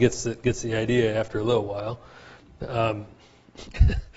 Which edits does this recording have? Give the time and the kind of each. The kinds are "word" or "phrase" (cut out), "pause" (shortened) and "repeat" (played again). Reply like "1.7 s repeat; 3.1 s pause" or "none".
none